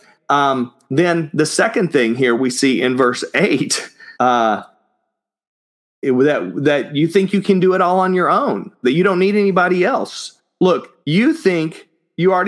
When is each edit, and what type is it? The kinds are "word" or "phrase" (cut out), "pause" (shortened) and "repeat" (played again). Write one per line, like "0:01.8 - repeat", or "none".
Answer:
0:04.1 - pause
0:11.0 - pause